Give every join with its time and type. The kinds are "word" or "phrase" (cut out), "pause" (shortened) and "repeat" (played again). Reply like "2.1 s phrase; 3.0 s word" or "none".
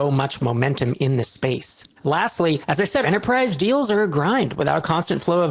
3.0 s word